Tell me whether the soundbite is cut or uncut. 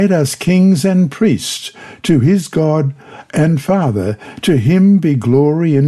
uncut